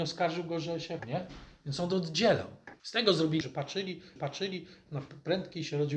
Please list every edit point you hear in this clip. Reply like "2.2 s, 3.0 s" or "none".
1.0 s, 2.8 s, 3.4 s, 4.2 s